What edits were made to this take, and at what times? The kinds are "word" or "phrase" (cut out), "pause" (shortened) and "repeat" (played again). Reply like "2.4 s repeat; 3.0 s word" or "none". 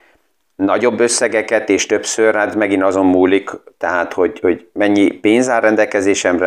5.1 s word